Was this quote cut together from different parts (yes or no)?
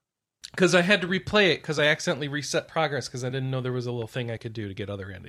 no